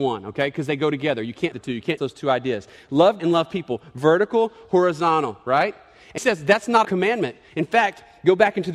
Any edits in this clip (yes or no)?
yes